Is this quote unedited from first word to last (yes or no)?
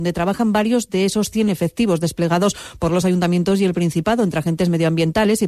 yes